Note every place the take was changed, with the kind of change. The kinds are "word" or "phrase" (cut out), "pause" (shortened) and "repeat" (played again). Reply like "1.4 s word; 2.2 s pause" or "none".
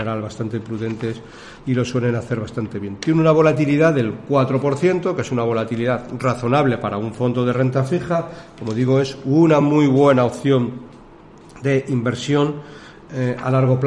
none